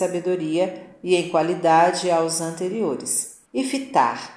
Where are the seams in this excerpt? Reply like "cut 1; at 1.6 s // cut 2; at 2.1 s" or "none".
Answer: cut 1; at 3.5 s

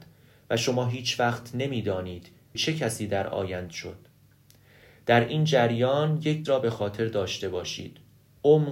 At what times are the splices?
cut 1; at 2.5 s // cut 2; at 3.7 s // cut 3; at 6.4 s

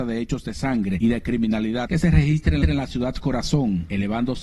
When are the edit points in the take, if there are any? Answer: cut 1; at 2.6 s

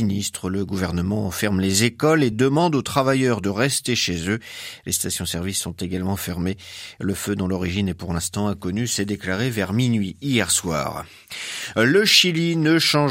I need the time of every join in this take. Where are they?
none

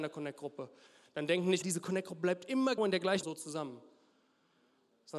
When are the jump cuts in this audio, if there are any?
cut 1; at 1.6 s // cut 2; at 2.8 s // cut 3; at 3.2 s

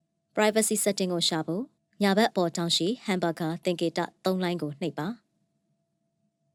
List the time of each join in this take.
cut 1; at 1.8 s

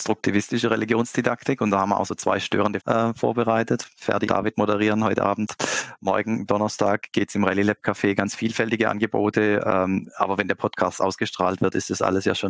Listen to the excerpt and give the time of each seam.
cut 1; at 2.8 s // cut 2; at 4.3 s

